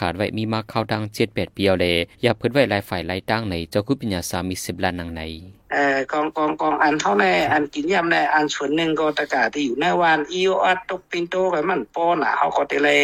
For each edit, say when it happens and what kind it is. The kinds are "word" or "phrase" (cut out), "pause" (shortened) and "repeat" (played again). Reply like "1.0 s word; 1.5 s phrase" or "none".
2.1 s pause; 5.6 s pause